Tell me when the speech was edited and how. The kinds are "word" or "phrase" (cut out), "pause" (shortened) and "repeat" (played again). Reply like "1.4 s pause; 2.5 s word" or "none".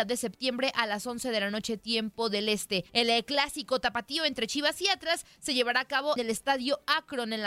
2.9 s pause; 6.2 s word